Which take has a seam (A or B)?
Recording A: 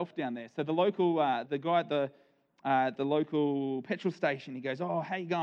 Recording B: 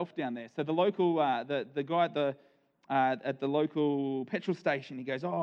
A